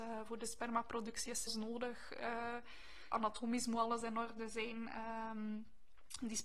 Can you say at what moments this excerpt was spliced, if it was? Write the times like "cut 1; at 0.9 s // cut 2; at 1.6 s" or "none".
cut 1; at 1.5 s // cut 2; at 3.1 s